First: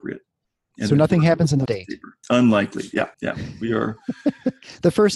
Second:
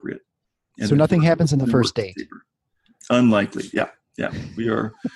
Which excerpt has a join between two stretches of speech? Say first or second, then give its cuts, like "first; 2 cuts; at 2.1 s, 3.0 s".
first; 3 cuts; at 1.7 s, 2.2 s, 3.1 s